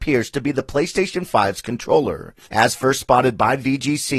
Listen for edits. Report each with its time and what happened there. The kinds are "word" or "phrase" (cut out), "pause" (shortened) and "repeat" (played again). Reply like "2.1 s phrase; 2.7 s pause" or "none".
2.4 s pause